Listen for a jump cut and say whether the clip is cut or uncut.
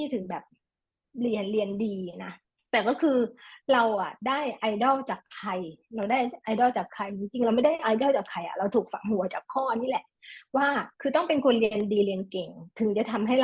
cut